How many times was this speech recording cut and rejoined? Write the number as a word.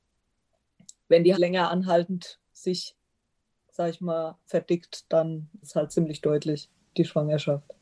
four